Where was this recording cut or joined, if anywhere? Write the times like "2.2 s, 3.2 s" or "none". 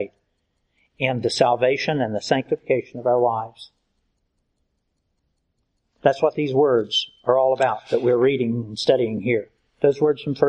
none